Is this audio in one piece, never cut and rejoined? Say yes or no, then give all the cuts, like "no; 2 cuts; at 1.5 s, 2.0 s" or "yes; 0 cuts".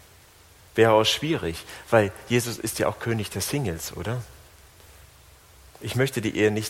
yes; 0 cuts